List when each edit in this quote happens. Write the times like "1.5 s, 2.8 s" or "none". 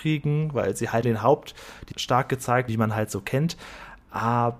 1.0 s, 1.9 s, 2.7 s